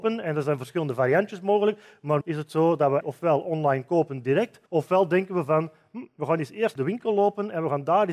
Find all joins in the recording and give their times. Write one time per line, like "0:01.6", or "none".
0:02.2
0:03.0
0:04.7
0:06.8